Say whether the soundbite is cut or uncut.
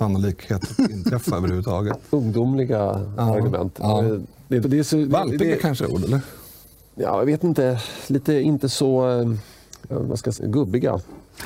cut